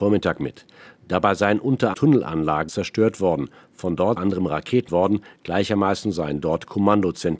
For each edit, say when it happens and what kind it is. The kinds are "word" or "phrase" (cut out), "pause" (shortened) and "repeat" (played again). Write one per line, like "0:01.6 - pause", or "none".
0:01.9 - word
0:02.7 - phrase
0:04.2 - phrase
0:04.9 - word